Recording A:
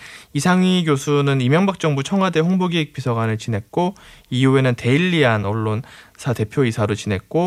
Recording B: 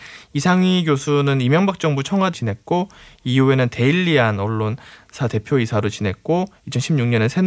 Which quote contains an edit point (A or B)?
B